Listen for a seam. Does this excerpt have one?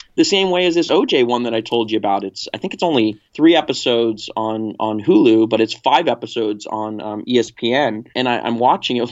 yes; 2 cuts; at 3.3 s, 8.1 s

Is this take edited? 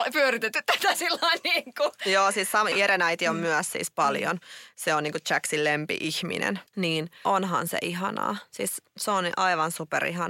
yes; 2 cuts; at 2.7 s, 6.7 s

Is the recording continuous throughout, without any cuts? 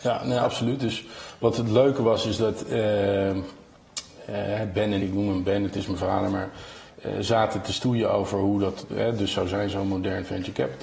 no; 1 cut; at 5.0 s

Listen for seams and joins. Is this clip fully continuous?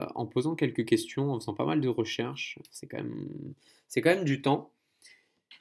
yes; 0 cuts

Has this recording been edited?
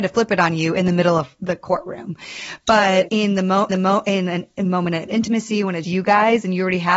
yes; 3 cuts; at 3.1 s, 3.7 s, 5.8 s

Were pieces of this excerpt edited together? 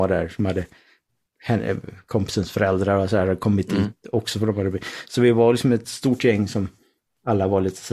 no; 0 cuts

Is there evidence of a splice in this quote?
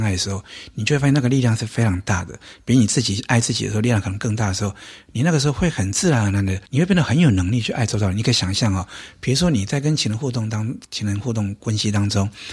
yes; 2 cuts; at 6.7 s, 10.8 s

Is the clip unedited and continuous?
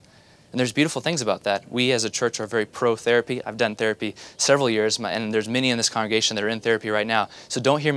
yes; 0 cuts

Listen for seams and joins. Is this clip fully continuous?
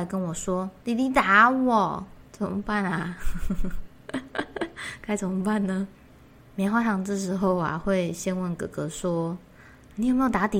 no; 2 cuts; at 2.3 s, 5.9 s

